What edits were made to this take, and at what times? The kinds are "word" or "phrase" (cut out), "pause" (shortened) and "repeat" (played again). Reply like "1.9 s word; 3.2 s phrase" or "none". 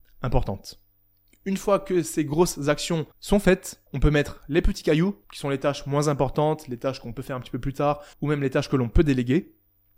3.1 s pause; 3.9 s pause; 5.2 s pause; 8.1 s pause